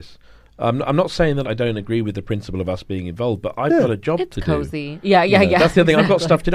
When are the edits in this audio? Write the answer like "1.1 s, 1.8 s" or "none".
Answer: 1.4 s

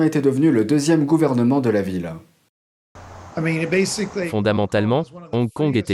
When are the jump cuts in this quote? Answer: none

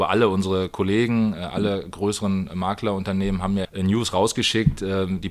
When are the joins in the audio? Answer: 3.6 s

